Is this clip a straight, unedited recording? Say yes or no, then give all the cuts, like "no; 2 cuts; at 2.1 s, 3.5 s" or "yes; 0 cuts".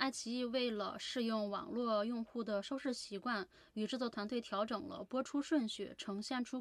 yes; 0 cuts